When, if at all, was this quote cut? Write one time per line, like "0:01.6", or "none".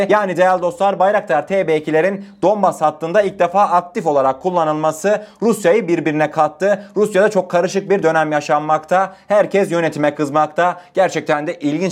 none